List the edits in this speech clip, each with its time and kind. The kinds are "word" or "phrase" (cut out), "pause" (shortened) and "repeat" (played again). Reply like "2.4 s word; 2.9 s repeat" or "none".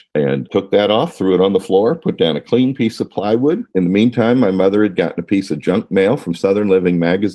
3.7 s pause